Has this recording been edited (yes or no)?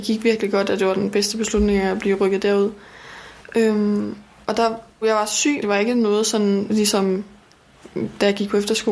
yes